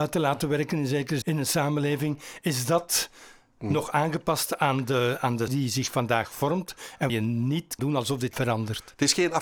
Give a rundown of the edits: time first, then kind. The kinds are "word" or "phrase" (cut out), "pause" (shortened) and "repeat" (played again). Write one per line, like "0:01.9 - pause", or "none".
0:01.2 - word
0:05.5 - word
0:07.1 - word
0:07.8 - word
0:08.3 - word